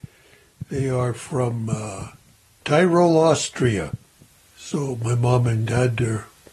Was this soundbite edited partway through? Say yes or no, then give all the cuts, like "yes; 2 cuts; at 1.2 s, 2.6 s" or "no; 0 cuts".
no; 0 cuts